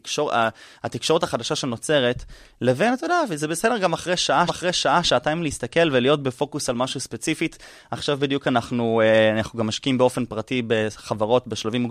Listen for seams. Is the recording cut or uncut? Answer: cut